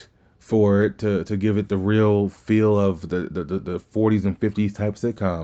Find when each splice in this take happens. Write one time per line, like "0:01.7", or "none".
none